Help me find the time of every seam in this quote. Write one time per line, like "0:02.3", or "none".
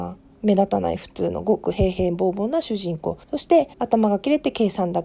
0:03.2
0:03.7